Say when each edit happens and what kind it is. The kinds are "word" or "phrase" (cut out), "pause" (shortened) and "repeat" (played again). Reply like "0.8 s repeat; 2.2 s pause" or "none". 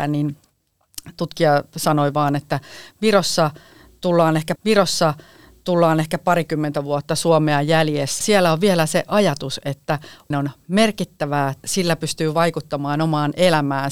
1.1 s word; 4.6 s repeat; 8.2 s word; 10.3 s word; 11.6 s word